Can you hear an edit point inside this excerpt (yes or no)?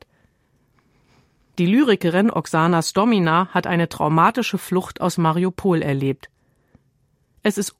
no